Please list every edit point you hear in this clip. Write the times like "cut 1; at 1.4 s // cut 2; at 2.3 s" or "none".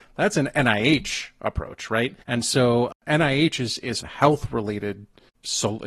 cut 1; at 2.2 s // cut 2; at 4.0 s